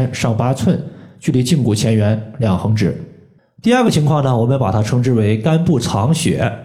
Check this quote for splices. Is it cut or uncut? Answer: uncut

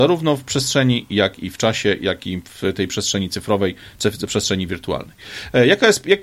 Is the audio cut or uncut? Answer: uncut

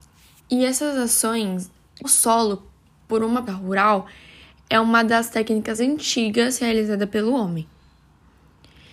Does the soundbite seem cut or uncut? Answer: cut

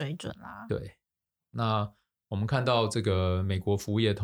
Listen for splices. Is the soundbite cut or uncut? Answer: uncut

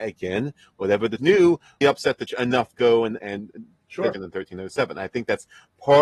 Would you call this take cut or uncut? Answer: cut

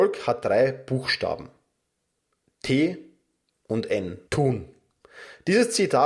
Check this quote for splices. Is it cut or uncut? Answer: cut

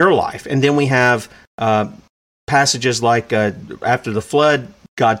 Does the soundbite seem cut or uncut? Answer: uncut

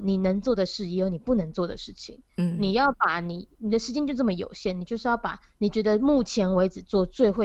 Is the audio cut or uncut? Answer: cut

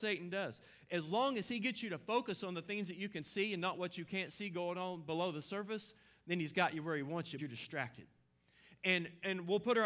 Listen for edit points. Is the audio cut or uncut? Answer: cut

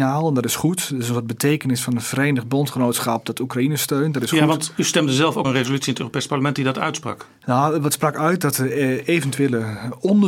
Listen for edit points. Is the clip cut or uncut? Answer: cut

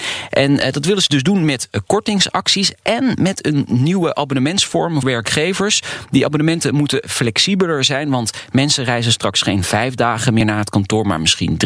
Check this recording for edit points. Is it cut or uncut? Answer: cut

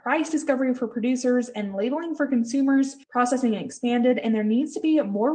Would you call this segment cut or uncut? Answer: cut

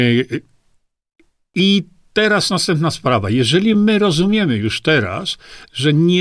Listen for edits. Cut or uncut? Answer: uncut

